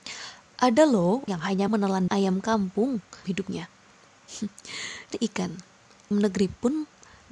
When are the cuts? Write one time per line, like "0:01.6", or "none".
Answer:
0:01.3
0:01.7
0:02.1
0:03.2
0:05.1
0:06.1